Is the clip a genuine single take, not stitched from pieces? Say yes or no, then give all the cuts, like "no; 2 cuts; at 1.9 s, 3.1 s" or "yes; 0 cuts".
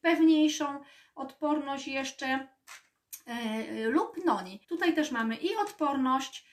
no; 1 cut; at 4.6 s